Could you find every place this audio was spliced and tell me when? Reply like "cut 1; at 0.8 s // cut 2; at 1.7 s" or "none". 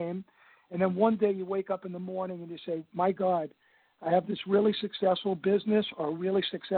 none